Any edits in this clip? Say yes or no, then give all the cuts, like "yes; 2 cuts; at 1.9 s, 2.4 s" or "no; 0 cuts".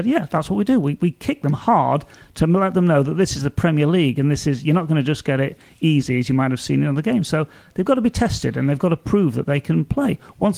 no; 0 cuts